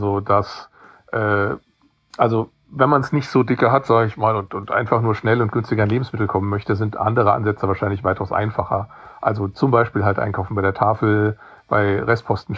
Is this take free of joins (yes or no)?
yes